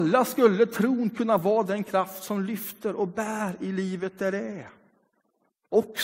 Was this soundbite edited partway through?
no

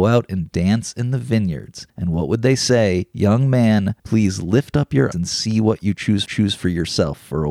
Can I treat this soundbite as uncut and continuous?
no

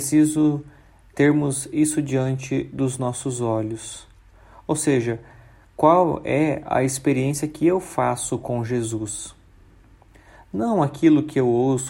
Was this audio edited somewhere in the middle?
no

